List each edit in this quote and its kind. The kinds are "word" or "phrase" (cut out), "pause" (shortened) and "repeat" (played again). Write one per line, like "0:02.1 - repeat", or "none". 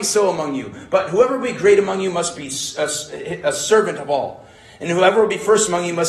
none